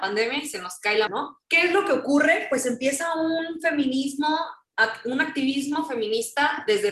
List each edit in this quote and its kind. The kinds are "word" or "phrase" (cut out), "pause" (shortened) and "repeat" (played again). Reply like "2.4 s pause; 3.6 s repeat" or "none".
1.1 s word; 1.4 s pause